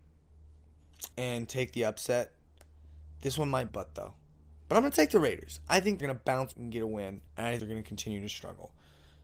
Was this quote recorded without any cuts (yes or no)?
no